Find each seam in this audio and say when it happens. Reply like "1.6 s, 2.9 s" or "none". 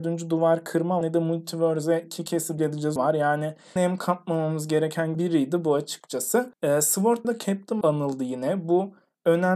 1.0 s, 2.6 s, 3.0 s, 3.8 s, 5.1 s, 7.2 s, 7.8 s